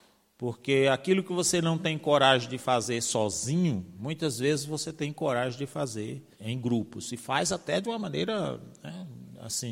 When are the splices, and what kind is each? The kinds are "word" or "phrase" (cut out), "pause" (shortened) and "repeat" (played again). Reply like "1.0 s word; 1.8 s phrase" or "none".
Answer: 6.3 s pause